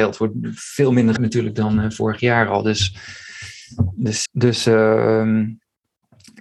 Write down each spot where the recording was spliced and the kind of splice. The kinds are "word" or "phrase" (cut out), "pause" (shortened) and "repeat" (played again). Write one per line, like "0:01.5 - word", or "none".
0:01.2 - word
0:04.3 - word